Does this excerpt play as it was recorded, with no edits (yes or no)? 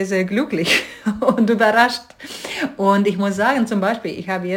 yes